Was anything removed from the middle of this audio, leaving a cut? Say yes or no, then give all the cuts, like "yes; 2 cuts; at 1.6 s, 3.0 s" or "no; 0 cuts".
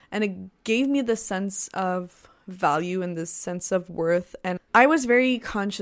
yes; 1 cut; at 4.6 s